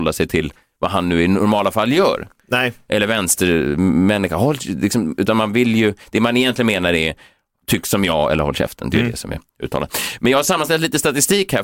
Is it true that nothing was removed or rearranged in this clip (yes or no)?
yes